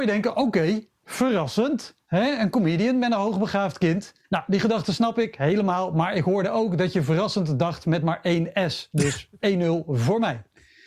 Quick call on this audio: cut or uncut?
cut